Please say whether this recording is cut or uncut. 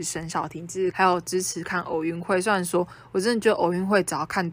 cut